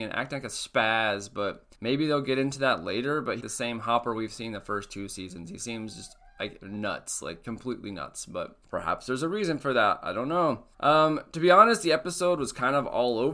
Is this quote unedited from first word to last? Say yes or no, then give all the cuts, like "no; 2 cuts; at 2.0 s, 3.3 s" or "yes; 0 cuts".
no; 4 cuts; at 1.7 s, 3.4 s, 8.6 s, 10.7 s